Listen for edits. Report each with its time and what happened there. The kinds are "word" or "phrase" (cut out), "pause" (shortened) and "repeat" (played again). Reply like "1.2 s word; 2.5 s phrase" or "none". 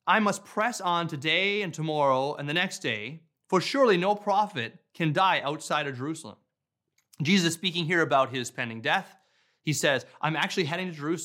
none